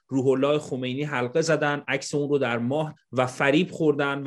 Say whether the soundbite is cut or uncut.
cut